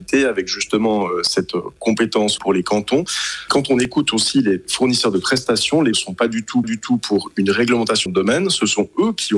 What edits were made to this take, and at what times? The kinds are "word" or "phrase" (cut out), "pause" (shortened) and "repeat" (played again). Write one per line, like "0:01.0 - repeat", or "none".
0:02.4 - word
0:05.9 - phrase
0:06.6 - repeat
0:08.1 - word